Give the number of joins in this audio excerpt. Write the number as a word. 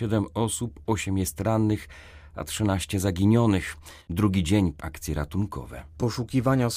two